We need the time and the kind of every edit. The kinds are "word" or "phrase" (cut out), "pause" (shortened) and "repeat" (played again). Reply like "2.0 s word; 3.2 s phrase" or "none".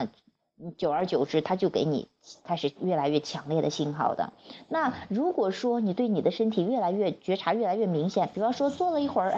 2.4 s pause